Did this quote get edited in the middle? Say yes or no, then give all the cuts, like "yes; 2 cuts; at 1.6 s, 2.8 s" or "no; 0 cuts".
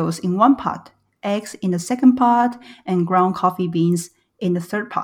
no; 0 cuts